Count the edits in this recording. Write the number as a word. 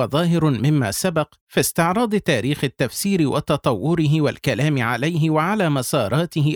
one